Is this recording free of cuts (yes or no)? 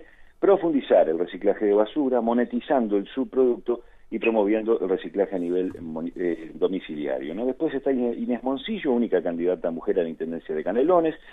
yes